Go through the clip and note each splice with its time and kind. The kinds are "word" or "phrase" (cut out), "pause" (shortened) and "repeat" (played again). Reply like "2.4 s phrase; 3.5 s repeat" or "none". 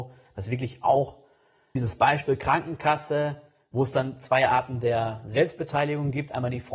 1.8 s word